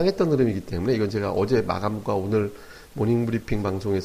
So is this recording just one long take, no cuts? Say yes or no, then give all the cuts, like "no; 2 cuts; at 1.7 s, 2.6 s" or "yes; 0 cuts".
yes; 0 cuts